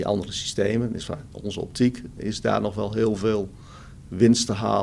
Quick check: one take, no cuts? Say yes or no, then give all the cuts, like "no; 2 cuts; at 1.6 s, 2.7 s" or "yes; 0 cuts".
no; 1 cut; at 2.2 s